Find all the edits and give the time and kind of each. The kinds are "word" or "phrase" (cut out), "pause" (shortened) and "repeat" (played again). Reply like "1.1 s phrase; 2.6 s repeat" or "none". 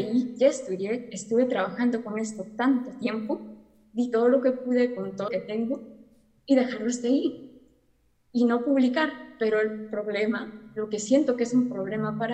5.3 s word